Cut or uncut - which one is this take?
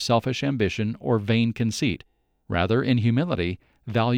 uncut